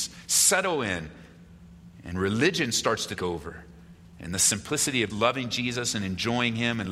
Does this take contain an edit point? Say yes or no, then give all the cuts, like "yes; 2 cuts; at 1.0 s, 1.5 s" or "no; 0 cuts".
yes; 2 cuts; at 3.2 s, 5.1 s